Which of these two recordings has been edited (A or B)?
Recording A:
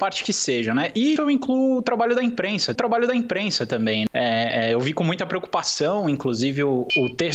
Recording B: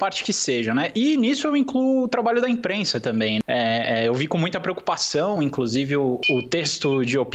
A